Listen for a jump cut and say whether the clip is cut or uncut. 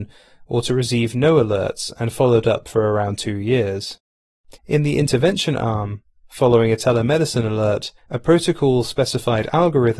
cut